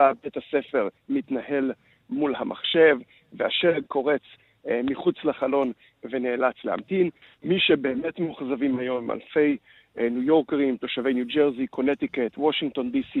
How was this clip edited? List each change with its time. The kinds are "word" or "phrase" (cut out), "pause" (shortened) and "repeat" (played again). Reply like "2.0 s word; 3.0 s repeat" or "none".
1.0 s pause